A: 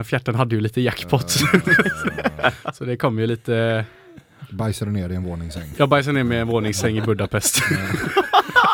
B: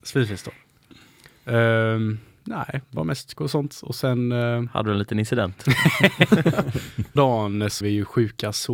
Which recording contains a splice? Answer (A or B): B